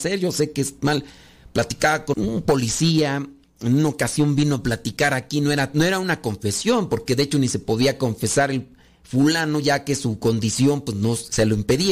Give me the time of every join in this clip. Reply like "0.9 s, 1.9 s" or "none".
2.1 s